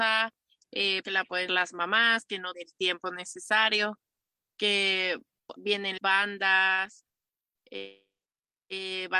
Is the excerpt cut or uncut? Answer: cut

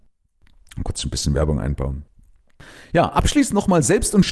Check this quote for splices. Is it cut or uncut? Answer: uncut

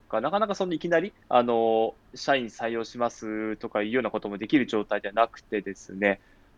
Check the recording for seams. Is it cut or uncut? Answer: cut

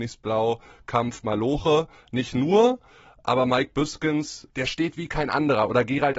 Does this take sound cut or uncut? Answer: uncut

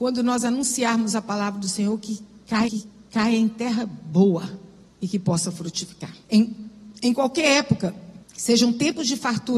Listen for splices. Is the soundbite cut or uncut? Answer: cut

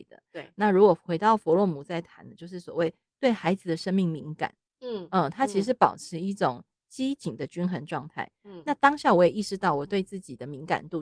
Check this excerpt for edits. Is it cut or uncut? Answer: uncut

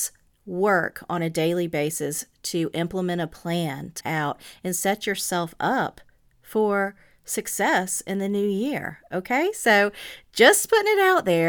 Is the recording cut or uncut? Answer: cut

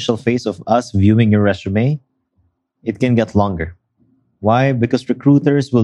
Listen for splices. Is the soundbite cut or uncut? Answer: uncut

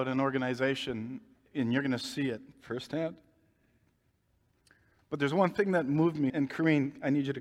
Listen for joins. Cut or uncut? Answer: cut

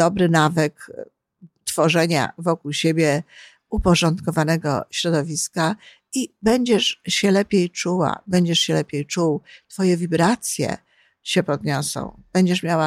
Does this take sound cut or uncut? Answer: uncut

